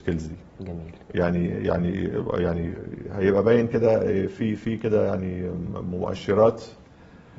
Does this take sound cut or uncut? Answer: cut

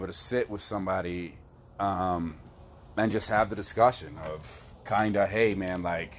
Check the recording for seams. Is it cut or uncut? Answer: uncut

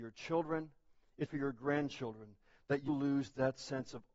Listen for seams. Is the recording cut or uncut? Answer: cut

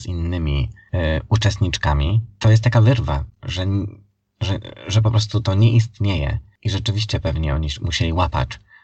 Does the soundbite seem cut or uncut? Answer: uncut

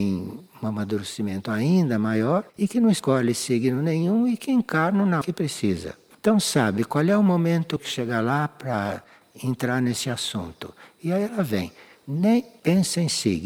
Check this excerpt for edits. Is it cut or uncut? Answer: cut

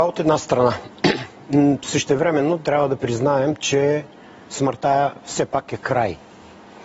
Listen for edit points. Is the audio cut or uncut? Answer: uncut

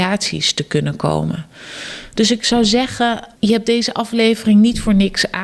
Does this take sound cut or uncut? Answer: cut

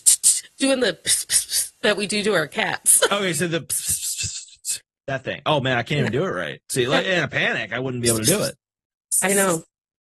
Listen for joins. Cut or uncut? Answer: uncut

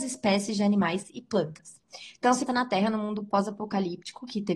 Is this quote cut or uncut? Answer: cut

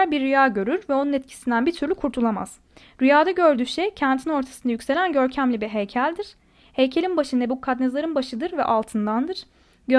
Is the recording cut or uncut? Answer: uncut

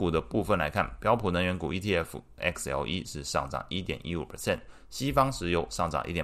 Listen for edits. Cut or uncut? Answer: uncut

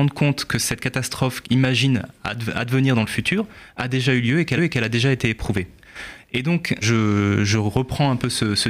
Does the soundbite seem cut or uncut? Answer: cut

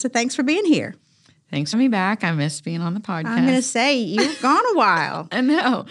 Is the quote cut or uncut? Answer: cut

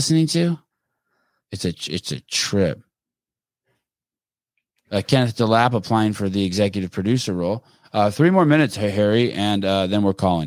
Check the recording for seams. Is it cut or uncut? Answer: uncut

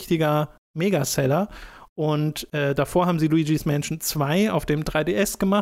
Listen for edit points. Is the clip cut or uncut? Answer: uncut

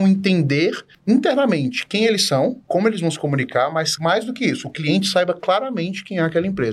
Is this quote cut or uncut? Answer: cut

